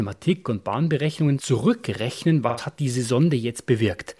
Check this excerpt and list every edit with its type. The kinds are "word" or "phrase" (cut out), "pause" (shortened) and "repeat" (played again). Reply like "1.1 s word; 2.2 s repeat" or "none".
none